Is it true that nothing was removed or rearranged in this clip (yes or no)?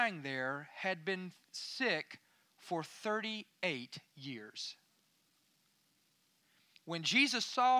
yes